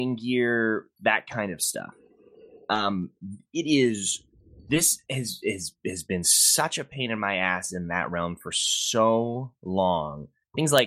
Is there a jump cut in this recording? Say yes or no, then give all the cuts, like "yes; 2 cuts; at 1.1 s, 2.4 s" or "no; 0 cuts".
no; 0 cuts